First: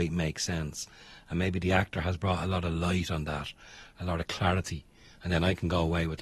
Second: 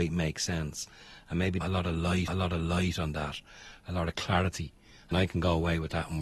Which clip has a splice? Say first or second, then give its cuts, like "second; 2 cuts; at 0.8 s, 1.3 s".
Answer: second; 3 cuts; at 1.6 s, 2.3 s, 5.1 s